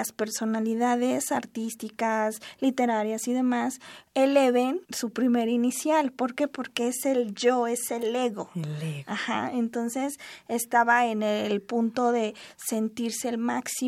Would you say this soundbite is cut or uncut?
cut